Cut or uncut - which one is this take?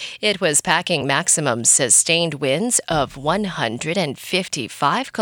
uncut